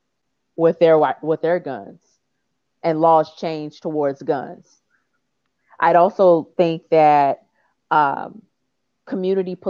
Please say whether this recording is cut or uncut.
uncut